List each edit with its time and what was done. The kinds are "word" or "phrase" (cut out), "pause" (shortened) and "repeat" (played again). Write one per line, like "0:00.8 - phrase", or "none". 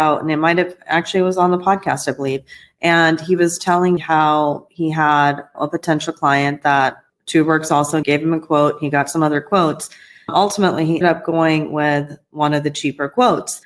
0:04.0 - word
0:08.0 - word
0:11.0 - word